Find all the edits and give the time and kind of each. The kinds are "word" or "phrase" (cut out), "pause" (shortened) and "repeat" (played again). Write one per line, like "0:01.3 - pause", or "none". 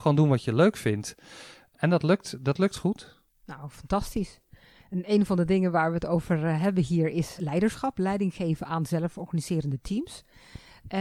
0:07.4 - word